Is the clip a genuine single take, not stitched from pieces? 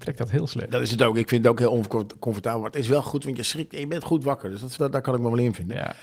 no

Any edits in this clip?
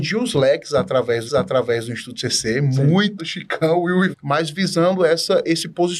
yes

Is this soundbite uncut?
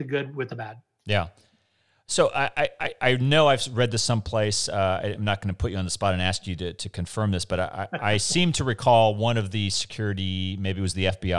yes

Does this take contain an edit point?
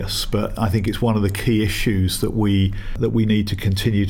no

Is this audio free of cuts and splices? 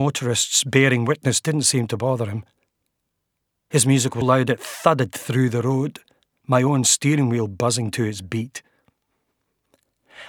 no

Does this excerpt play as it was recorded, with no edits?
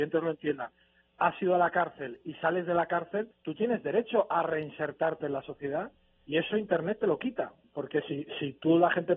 no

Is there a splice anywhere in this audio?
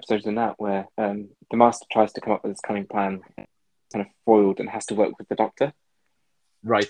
yes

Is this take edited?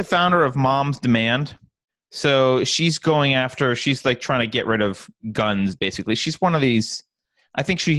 yes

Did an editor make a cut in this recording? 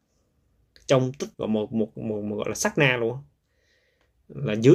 yes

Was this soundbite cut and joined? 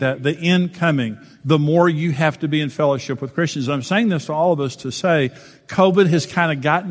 no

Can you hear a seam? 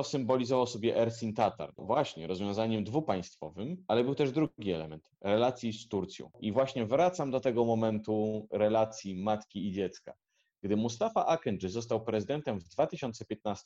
yes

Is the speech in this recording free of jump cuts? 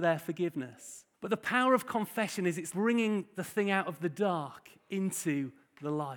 no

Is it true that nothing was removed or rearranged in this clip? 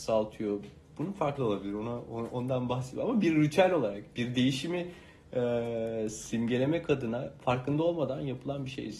no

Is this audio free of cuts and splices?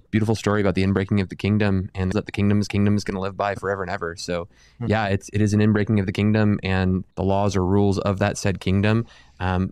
no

